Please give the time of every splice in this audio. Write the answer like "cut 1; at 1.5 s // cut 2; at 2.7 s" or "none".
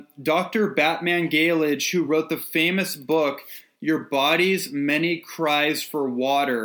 none